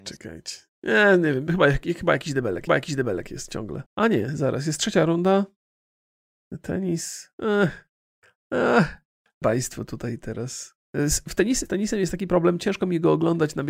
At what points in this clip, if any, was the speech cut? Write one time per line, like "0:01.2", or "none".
0:02.7
0:03.9
0:09.4
0:10.8
0:11.7